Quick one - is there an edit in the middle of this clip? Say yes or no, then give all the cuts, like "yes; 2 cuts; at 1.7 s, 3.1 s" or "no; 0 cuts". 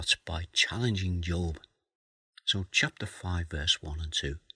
no; 0 cuts